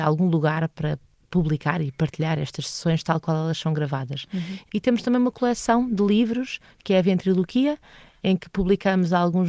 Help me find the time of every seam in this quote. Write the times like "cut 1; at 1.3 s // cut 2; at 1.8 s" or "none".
none